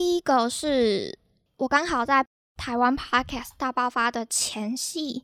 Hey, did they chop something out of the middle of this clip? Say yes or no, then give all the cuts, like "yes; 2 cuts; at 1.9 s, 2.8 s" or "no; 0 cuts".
no; 0 cuts